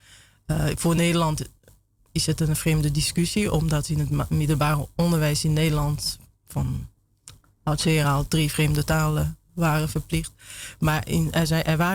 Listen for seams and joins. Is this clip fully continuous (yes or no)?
yes